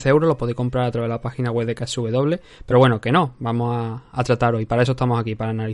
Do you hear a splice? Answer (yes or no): no